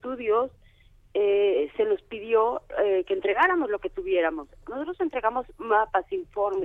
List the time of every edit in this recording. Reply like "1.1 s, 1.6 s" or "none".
none